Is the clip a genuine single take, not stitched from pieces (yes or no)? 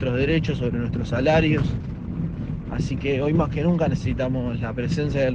yes